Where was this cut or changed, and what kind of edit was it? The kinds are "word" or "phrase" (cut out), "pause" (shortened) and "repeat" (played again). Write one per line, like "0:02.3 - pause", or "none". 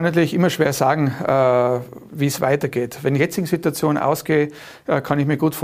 0:02.1 - pause
0:03.2 - phrase